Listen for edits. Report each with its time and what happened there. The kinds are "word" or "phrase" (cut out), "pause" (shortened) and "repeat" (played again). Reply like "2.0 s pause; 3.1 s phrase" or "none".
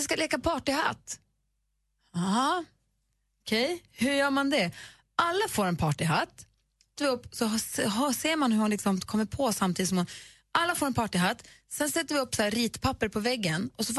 7.0 s phrase